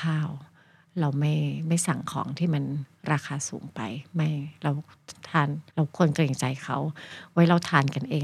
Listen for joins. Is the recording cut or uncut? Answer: cut